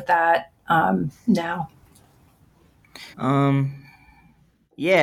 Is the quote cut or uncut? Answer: cut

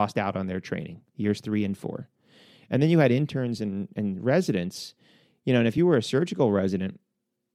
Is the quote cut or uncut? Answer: uncut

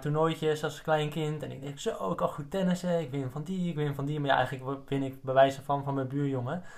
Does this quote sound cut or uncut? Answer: uncut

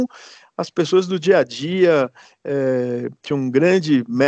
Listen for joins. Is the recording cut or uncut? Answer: uncut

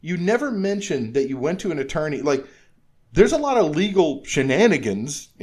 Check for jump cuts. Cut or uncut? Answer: uncut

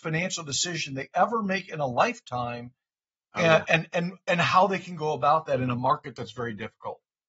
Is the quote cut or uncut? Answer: uncut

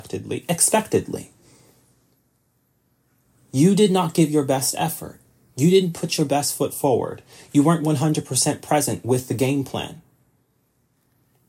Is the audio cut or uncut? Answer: uncut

